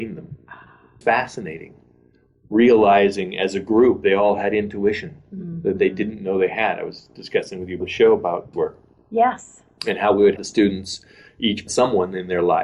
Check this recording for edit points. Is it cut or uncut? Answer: cut